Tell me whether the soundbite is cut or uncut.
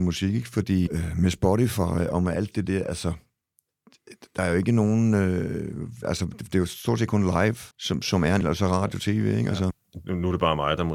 cut